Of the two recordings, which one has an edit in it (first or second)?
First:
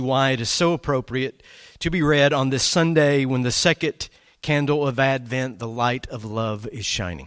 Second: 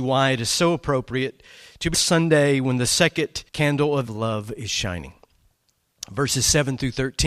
second